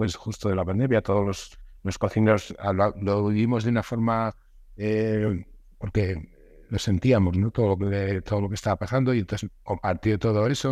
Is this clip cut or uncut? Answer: uncut